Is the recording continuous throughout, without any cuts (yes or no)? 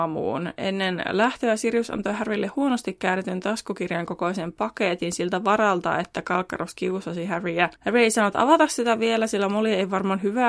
no